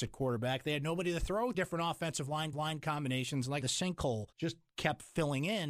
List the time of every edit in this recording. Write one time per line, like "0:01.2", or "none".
0:01.5
0:02.5
0:03.6
0:04.3